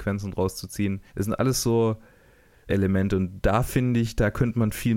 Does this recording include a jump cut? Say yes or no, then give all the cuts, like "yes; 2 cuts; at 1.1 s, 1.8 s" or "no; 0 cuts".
yes; 2 cuts; at 1.1 s, 2.7 s